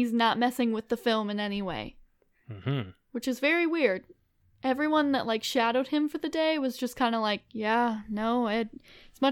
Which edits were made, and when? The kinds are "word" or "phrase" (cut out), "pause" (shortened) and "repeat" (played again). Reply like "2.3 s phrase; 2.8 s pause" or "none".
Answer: none